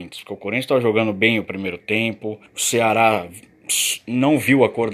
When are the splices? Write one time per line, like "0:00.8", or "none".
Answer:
0:02.5